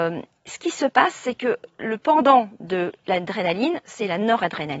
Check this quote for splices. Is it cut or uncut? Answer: uncut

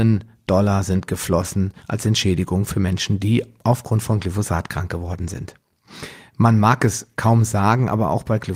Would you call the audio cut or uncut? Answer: cut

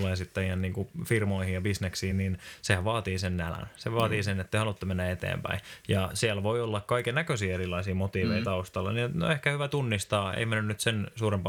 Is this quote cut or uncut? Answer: uncut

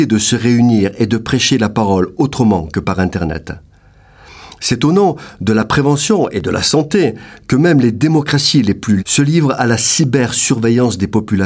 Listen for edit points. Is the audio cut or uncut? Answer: cut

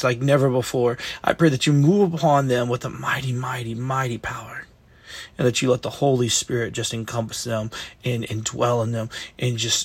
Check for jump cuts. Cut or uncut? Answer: uncut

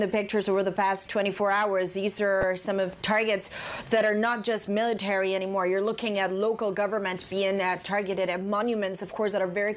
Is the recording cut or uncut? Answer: uncut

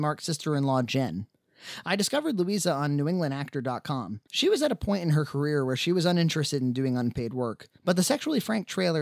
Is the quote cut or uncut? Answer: cut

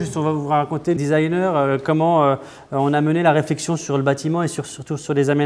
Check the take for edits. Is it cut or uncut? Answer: cut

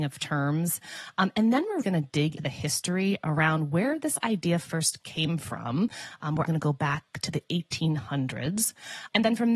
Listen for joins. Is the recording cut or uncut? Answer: cut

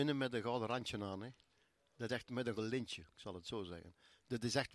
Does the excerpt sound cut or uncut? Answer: cut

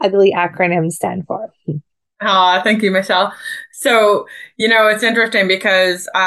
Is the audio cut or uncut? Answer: uncut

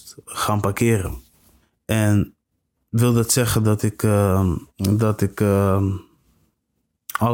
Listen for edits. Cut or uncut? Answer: cut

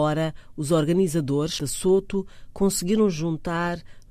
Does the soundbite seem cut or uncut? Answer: cut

